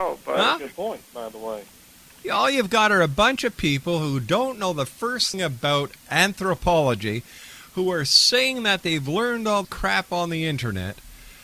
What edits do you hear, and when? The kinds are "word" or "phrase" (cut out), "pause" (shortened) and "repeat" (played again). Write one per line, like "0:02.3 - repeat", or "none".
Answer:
0:05.3 - word
0:09.6 - word